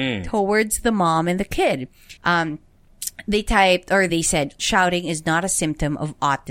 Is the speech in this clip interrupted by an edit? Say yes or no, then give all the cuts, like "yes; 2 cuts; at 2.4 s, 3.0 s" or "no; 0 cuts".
yes; 3 cuts; at 2.2 s, 4.1 s, 4.6 s